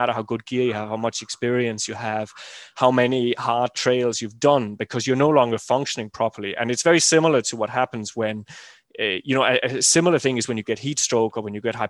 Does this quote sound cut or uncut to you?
uncut